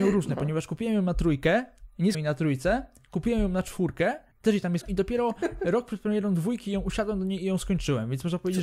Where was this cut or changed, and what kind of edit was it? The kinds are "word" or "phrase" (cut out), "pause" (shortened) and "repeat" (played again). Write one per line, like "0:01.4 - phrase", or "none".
0:02.1 - word
0:04.3 - pause
0:04.8 - word